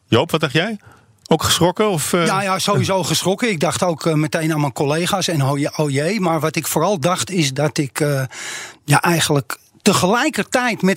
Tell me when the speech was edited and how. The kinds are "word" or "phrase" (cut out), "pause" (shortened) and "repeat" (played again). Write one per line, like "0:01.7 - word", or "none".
none